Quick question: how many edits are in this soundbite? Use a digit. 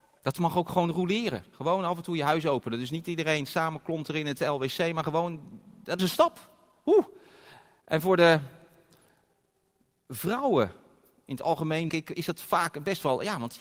2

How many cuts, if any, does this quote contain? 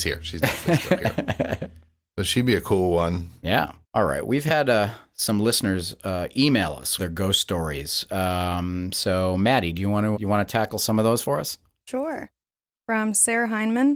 3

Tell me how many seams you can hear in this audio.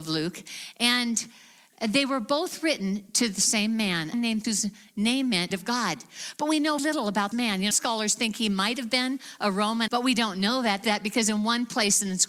8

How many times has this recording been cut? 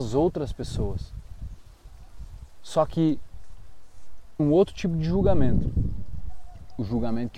2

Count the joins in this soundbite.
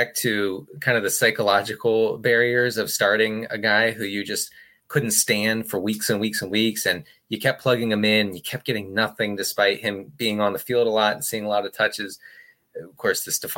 0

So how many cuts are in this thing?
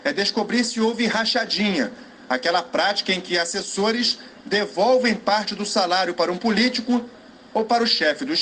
0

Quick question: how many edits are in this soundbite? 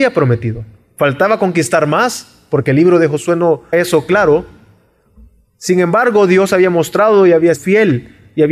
2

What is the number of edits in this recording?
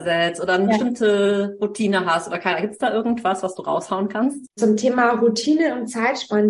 1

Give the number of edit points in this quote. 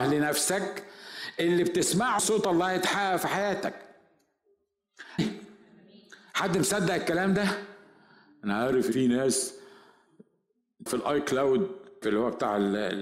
5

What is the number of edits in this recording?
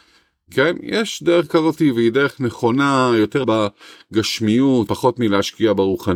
2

